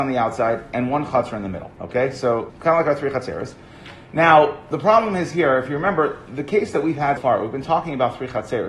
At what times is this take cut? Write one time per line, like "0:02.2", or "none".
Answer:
0:01.7
0:02.5
0:07.2